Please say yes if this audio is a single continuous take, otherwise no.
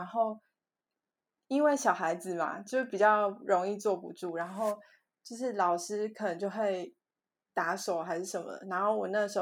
yes